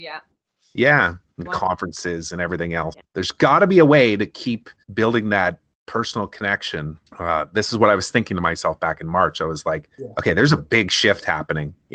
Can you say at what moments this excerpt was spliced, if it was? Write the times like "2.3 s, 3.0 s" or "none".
1.5 s, 2.9 s, 4.8 s, 7.1 s, 9.9 s